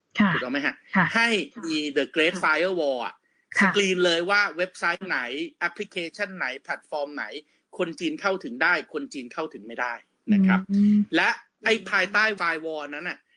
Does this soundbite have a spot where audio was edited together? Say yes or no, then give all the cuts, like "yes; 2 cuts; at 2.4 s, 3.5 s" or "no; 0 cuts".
no; 0 cuts